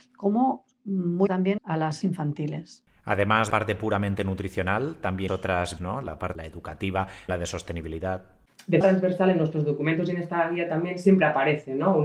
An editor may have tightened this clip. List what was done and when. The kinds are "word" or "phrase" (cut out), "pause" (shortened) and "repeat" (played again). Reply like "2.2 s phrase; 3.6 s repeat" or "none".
1.3 s word; 1.6 s word; 2.0 s word; 3.5 s word; 5.3 s word; 5.8 s word; 6.4 s word; 7.3 s word; 8.8 s word